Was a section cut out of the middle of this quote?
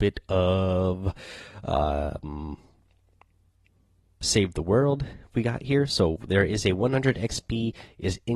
no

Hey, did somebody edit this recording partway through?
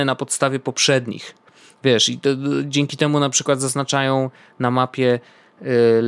no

